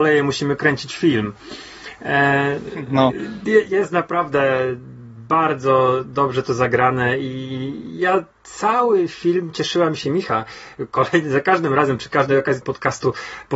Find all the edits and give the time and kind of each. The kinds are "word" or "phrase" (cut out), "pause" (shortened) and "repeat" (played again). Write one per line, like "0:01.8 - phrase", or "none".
0:12.6 - word